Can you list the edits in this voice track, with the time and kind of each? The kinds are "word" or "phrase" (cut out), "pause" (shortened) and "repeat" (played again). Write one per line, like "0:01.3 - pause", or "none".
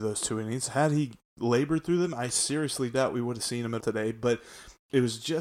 0:03.8 - word